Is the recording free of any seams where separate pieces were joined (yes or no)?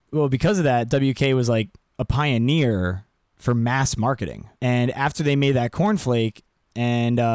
no